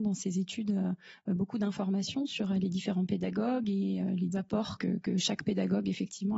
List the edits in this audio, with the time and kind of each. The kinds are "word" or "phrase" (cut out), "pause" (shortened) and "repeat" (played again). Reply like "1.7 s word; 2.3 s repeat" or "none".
4.3 s word; 4.8 s word